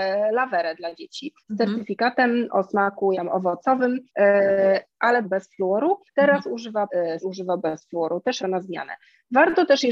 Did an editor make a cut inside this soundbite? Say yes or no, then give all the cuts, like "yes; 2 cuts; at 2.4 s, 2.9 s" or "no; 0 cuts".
yes; 8 cuts; at 1.4 s, 3.1 s, 4.1 s, 5.2 s, 6.1 s, 6.9 s, 7.2 s, 8.4 s